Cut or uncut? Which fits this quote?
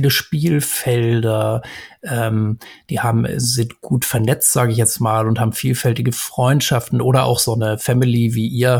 uncut